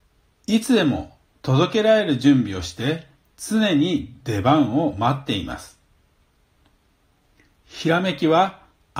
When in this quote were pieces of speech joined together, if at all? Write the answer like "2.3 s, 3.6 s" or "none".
none